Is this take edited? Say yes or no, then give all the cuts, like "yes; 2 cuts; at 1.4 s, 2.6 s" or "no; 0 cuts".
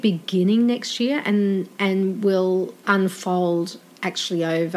no; 0 cuts